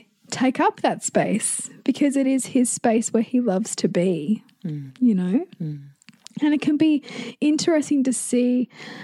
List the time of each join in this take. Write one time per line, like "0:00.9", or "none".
none